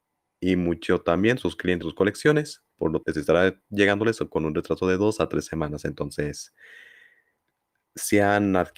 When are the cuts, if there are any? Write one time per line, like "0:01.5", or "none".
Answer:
0:01.8
0:02.7
0:03.0